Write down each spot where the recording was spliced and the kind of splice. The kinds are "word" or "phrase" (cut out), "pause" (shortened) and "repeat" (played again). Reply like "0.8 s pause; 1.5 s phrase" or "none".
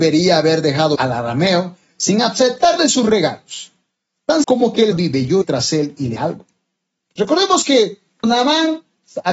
1.0 s word; 2.8 s word; 4.4 s word; 4.9 s word; 5.4 s word; 6.2 s word; 8.2 s word